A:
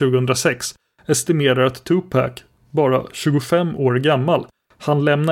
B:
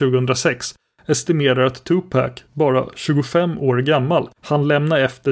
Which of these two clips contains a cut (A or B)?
B